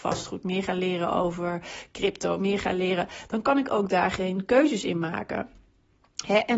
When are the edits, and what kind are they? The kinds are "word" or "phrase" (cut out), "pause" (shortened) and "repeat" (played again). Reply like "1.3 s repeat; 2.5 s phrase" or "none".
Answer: none